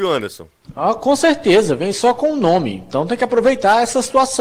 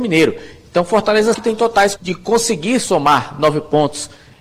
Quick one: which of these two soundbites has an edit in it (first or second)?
second